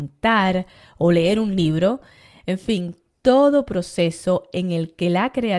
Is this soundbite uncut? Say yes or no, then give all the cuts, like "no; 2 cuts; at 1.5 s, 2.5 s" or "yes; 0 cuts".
yes; 0 cuts